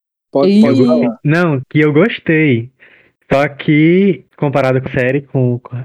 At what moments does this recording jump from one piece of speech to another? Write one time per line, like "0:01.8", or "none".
0:01.6
0:04.3
0:04.9